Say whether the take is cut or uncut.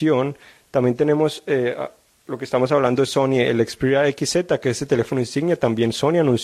uncut